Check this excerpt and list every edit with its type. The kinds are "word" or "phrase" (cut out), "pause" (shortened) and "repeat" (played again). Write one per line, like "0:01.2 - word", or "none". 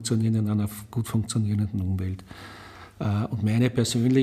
none